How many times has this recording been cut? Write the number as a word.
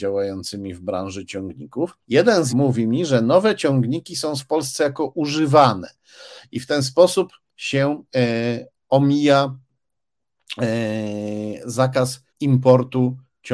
five